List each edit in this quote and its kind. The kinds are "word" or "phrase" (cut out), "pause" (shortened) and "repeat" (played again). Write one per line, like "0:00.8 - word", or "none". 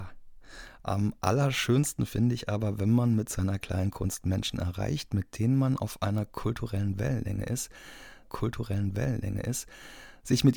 0:08.2 - repeat